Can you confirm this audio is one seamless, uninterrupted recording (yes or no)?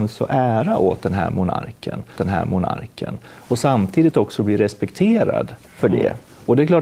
no